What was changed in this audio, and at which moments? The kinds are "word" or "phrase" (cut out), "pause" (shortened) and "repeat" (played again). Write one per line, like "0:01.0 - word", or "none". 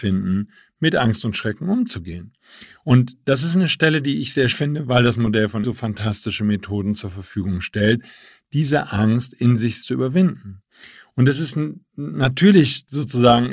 0:04.5 - word
0:05.6 - word
0:09.8 - word